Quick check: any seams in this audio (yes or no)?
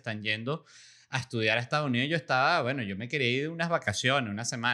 no